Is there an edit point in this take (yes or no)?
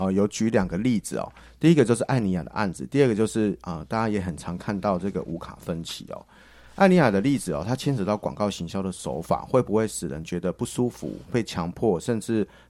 yes